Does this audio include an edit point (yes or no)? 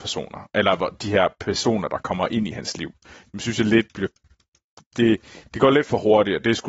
no